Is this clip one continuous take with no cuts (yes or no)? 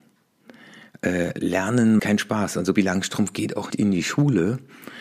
no